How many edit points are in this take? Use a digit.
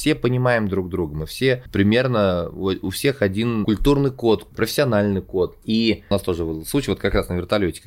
0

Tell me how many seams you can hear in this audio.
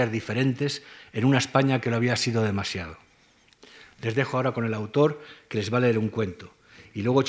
0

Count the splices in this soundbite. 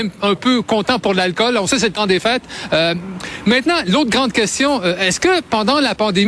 0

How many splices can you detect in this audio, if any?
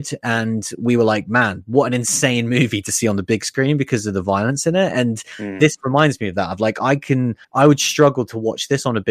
1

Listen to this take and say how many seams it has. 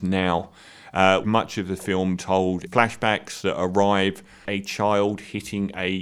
4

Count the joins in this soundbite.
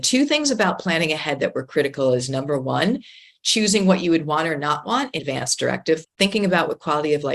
2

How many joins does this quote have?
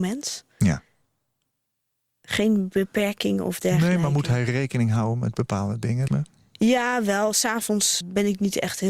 2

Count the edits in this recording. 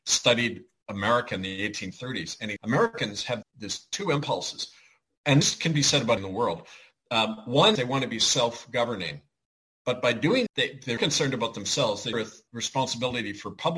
9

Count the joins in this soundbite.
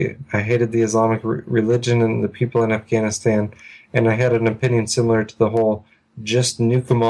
0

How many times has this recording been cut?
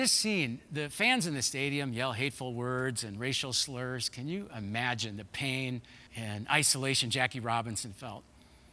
1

